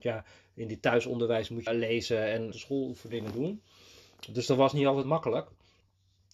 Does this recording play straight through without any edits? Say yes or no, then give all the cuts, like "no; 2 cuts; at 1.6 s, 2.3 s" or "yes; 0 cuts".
no; 3 cuts; at 1.7 s, 2.5 s, 5.0 s